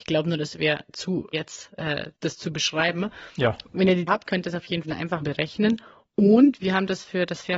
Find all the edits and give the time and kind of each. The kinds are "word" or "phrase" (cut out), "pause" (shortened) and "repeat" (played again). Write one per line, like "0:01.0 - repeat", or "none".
0:01.3 - word
0:02.2 - pause
0:04.1 - word
0:04.8 - phrase
0:05.2 - word